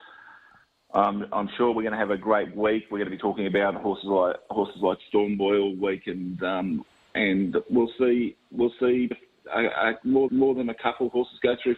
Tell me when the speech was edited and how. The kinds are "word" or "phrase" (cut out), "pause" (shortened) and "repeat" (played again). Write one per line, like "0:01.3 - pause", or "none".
0:09.1 - word
0:10.3 - repeat